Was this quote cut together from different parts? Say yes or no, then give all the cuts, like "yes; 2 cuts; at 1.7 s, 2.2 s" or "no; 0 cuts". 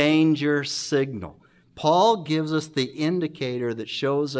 no; 0 cuts